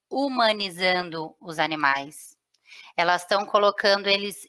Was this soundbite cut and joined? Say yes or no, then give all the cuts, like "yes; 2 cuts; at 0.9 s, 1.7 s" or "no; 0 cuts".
no; 0 cuts